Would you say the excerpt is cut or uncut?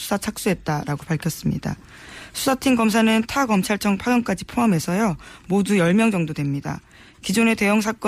uncut